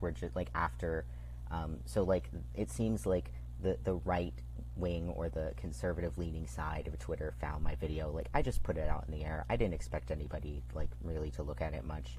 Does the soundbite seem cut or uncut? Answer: uncut